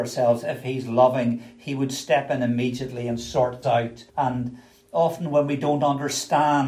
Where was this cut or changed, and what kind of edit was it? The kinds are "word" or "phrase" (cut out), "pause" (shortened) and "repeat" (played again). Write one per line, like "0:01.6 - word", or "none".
0:03.6 - word
0:04.1 - pause